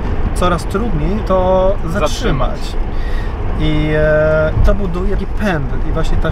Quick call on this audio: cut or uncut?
cut